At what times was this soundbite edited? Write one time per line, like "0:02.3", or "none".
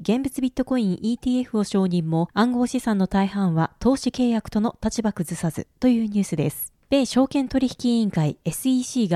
none